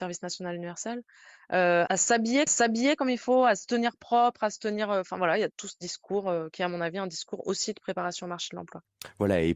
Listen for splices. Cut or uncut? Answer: cut